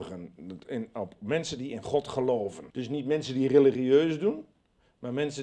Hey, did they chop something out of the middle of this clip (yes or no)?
yes